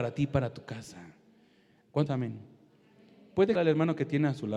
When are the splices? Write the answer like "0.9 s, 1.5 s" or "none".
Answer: 2.1 s, 3.6 s